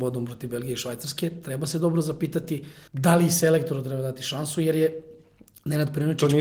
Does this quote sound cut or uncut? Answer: cut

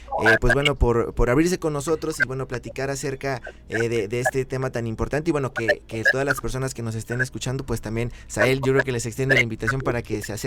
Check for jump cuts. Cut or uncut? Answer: uncut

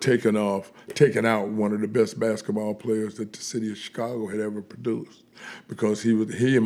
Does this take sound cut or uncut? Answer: uncut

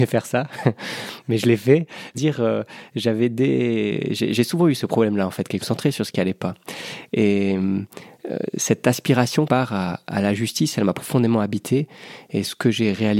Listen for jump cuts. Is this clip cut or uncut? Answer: cut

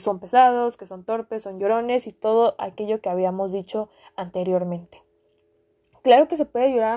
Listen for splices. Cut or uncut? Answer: uncut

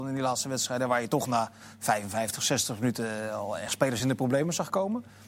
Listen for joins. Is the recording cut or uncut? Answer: uncut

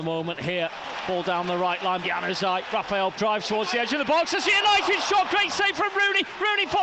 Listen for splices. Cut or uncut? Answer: cut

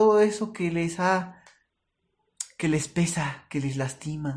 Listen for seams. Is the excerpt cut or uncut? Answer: uncut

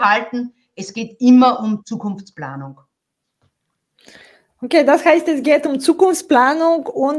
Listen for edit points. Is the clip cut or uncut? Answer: uncut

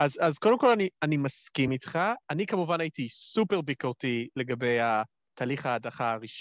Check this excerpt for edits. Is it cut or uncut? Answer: uncut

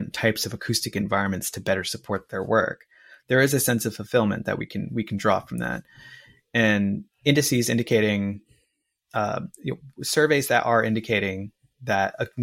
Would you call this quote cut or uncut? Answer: uncut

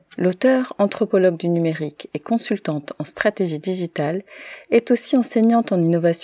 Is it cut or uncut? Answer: uncut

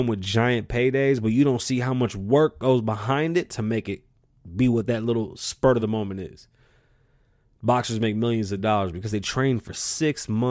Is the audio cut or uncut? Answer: uncut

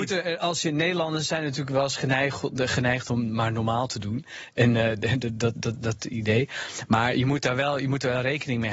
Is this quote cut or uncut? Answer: uncut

